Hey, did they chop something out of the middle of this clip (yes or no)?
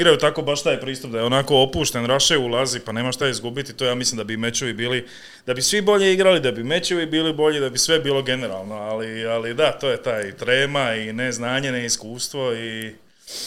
no